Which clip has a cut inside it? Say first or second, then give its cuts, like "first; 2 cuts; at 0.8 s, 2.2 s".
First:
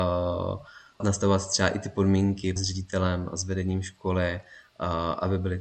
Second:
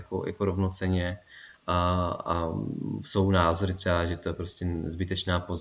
first; 2 cuts; at 1.0 s, 2.6 s